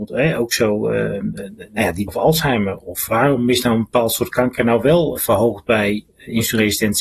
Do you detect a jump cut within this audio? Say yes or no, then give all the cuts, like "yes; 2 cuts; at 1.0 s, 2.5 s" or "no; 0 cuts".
yes; 3 cuts; at 2.1 s, 3.1 s, 5.2 s